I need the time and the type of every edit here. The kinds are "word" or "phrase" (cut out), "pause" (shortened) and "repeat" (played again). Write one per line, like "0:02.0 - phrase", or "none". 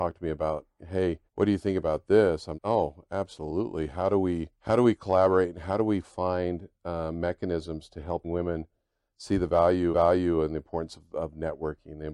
0:01.3 - pause
0:02.5 - word
0:04.5 - pause
0:08.2 - word
0:09.9 - repeat